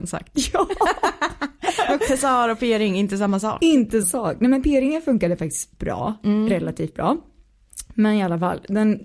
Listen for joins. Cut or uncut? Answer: cut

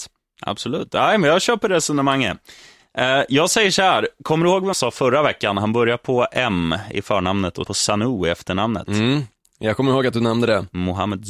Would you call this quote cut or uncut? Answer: cut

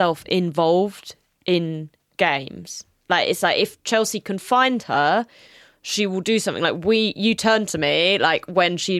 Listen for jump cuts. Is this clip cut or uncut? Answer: uncut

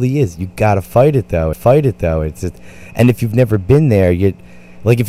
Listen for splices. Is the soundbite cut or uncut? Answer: cut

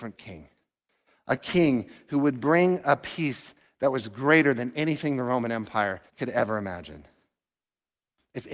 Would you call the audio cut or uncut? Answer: cut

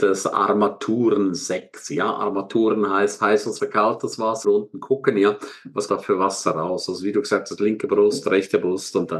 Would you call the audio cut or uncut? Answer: cut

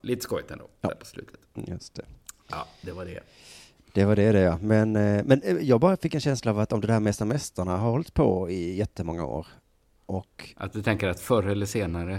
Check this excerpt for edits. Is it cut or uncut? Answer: uncut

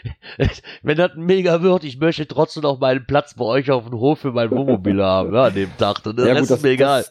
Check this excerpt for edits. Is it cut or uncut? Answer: uncut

